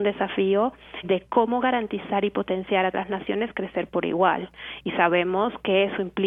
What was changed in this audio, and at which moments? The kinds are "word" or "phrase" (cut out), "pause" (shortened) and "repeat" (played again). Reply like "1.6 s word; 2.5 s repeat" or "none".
1.0 s word; 2.9 s word